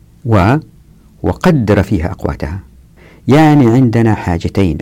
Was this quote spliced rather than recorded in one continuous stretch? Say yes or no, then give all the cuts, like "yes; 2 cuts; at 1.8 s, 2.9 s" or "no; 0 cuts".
no; 0 cuts